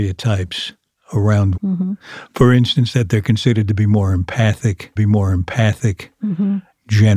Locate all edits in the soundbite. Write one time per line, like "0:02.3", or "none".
0:01.5
0:05.0